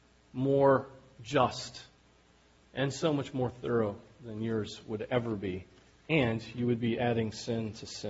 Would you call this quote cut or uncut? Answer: uncut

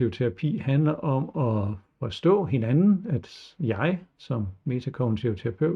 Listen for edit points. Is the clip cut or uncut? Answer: uncut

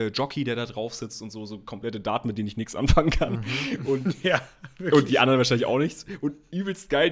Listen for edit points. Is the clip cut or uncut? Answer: uncut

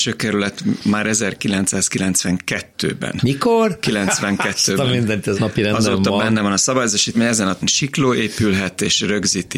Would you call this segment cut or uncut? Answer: cut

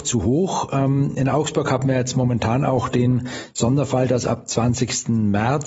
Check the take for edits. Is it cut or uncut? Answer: uncut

